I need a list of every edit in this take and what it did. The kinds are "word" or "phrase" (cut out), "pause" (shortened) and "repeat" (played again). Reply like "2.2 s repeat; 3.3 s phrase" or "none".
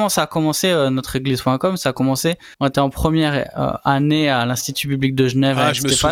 2.5 s pause